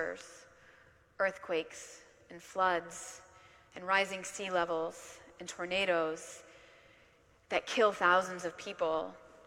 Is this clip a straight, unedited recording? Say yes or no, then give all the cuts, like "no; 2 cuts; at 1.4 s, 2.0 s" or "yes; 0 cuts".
yes; 0 cuts